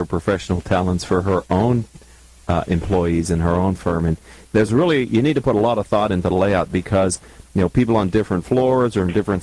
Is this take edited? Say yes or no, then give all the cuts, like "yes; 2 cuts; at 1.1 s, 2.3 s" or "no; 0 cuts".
no; 0 cuts